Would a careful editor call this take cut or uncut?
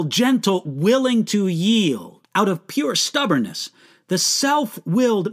cut